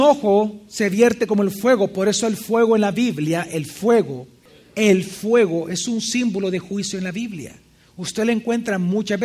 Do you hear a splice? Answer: no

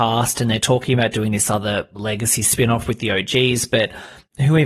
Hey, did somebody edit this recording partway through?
no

